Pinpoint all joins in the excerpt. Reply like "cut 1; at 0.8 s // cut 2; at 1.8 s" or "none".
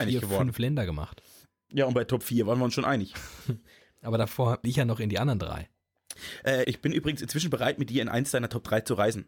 cut 1; at 4.6 s // cut 2; at 6.6 s